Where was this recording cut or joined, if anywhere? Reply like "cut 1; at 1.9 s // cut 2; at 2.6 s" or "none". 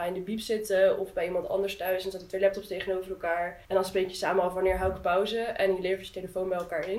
cut 1; at 3.6 s